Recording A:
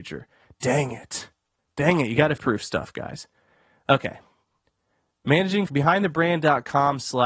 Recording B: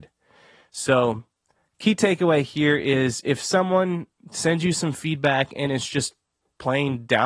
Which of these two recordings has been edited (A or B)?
A